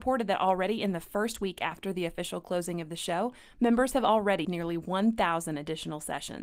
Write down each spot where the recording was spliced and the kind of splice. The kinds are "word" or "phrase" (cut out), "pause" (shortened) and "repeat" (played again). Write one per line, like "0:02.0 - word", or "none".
0:04.4 - word